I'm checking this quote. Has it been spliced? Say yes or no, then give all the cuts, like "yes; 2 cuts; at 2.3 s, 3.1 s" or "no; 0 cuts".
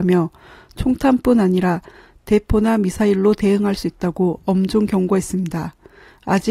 no; 0 cuts